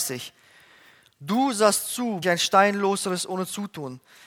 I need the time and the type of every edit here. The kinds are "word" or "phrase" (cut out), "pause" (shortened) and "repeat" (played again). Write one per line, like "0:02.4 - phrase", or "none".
0:02.2 - phrase